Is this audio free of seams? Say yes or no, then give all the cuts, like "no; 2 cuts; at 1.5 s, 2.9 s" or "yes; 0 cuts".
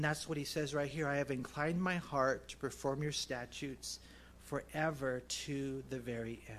yes; 0 cuts